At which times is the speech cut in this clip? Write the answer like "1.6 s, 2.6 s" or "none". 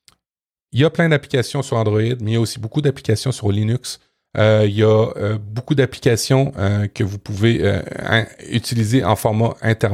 none